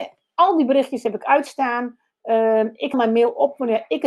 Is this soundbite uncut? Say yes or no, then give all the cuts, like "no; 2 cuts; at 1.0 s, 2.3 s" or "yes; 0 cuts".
no; 1 cut; at 2.9 s